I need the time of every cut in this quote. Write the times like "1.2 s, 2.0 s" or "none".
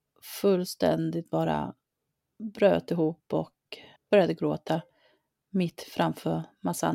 4.0 s

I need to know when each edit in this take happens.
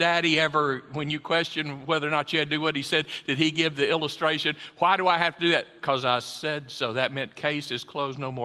none

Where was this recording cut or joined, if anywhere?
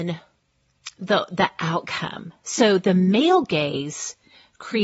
none

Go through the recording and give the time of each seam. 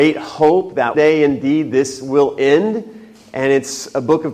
0.9 s

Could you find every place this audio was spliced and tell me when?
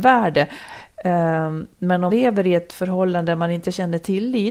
2.1 s

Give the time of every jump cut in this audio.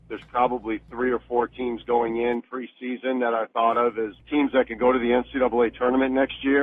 4.2 s

